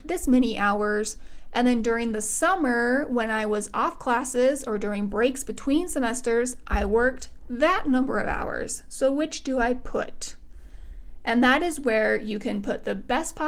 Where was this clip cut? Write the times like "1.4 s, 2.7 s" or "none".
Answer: none

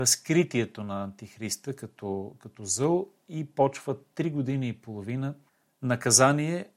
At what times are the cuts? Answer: 5.5 s

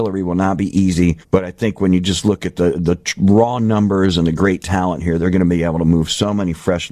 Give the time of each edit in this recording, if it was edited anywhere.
1.2 s

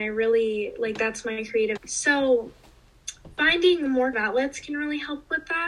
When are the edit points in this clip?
1.8 s, 4.1 s

